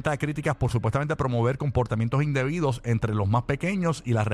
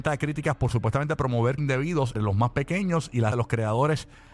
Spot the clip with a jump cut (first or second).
second